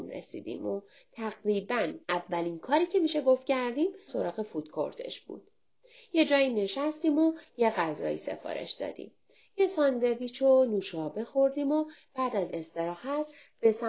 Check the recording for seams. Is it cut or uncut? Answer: cut